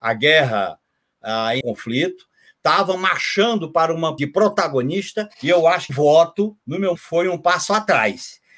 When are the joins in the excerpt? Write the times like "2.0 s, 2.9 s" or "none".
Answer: 1.6 s, 4.2 s, 5.3 s, 5.9 s, 6.6 s, 7.0 s